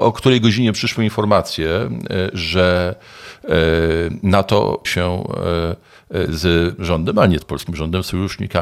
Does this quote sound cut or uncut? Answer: cut